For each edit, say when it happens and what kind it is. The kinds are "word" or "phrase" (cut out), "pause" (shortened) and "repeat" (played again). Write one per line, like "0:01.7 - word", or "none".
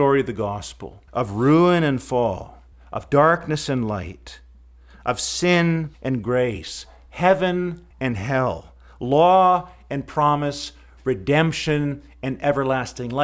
0:01.1 - pause
0:02.7 - pause
0:05.9 - pause
0:07.9 - pause